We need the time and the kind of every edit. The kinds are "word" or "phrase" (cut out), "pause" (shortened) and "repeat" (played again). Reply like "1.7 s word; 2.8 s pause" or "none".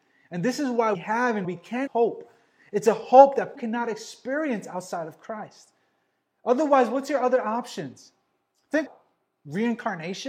0.9 s word; 1.4 s word; 1.9 s word; 3.5 s word; 8.9 s word